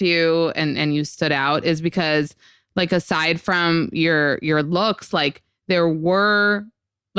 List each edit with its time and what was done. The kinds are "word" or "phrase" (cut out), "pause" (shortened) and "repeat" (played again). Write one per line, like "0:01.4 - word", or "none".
none

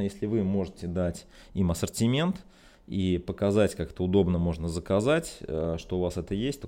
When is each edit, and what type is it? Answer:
none

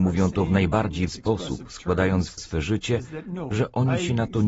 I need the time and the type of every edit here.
0:01.1 - word
0:02.4 - word

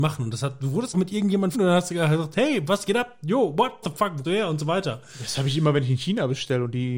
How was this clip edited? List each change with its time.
0:00.9 - word
0:01.5 - word
0:03.8 - word
0:04.2 - word

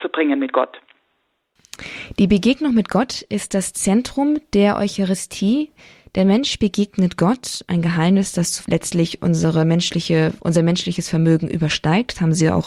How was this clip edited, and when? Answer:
0:08.6 - word
0:10.4 - word

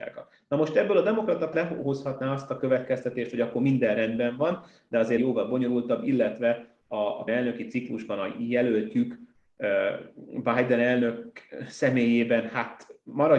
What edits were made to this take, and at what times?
0:01.5 - word
0:05.2 - word
0:07.3 - word

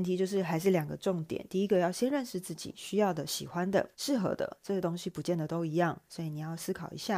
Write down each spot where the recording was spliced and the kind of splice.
0:03.9 - pause

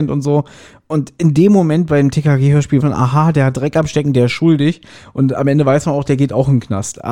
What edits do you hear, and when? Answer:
0:02.8 - word

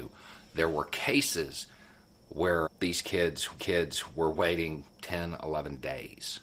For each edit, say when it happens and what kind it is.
0:02.6 - word
0:03.6 - repeat
0:04.9 - pause

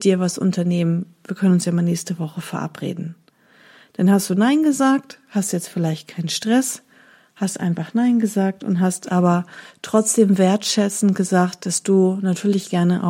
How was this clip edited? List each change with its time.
none

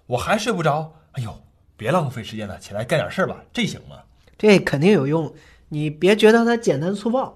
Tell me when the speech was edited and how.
none

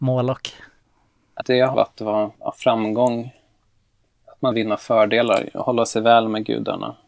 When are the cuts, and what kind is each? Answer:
0:01.4 - word
0:01.7 - phrase
0:02.3 - pause
0:04.5 - word

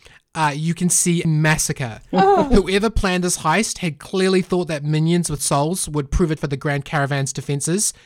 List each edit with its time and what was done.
0:01.2 - word
0:05.4 - word
0:06.4 - word

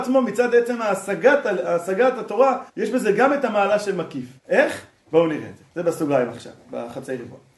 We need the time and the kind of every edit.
0:02.7 - pause
0:04.4 - pause
0:05.7 - pause

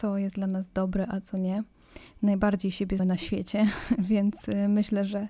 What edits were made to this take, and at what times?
0:03.0 - word

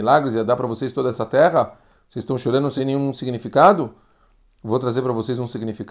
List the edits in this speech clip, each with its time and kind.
none

